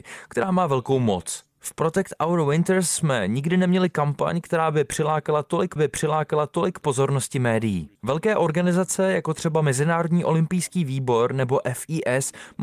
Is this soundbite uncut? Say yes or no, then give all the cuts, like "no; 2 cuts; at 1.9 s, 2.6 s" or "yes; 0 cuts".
no; 2 cuts; at 5.8 s, 7.9 s